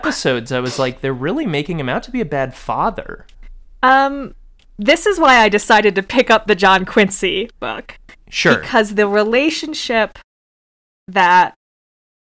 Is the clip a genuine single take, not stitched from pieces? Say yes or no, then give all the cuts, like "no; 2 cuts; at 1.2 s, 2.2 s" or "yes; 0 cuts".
yes; 0 cuts